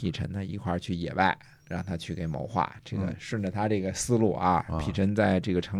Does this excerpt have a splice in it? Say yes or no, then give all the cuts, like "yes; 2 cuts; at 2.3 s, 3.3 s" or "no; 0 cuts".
no; 0 cuts